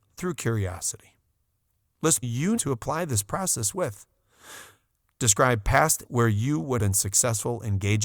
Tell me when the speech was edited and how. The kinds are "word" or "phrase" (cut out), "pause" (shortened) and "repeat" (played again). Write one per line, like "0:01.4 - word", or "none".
0:02.2 - word
0:02.6 - word
0:06.0 - word
0:06.8 - word